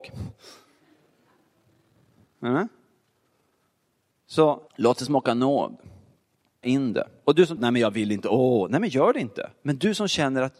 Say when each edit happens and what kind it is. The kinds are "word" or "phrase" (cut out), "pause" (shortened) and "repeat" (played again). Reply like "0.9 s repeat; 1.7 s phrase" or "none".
4.7 s pause; 6.6 s word; 7.6 s phrase